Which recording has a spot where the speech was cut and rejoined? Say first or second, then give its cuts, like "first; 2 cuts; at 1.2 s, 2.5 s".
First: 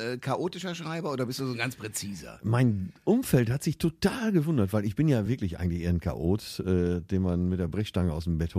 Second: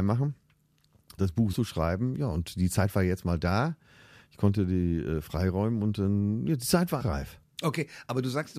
second; 3 cuts; at 1.2 s, 1.5 s, 7.0 s